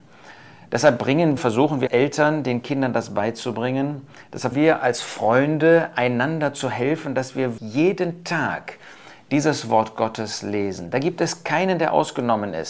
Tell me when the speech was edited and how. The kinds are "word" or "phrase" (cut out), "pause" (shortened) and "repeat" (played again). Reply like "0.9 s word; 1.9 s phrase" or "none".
1.4 s word; 1.9 s word; 4.5 s word; 7.6 s word